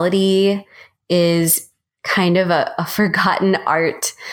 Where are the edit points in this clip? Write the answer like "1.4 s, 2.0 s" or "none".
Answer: none